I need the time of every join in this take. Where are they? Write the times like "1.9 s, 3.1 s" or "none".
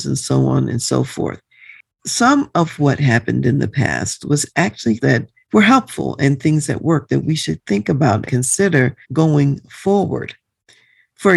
5.0 s, 5.4 s, 8.3 s, 9.0 s